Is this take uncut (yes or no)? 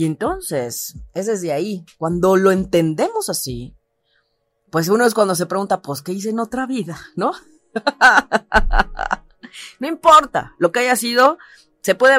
yes